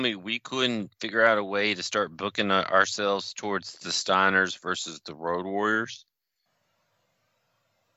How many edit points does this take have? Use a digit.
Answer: 0